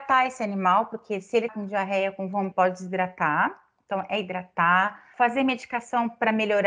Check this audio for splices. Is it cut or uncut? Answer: cut